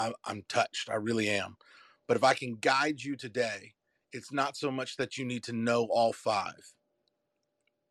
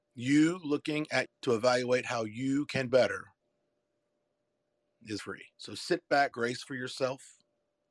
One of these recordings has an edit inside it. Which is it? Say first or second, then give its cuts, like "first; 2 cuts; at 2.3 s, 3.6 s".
second; 5 cuts; at 1.3 s, 2.9 s, 5.2 s, 5.5 s, 6.3 s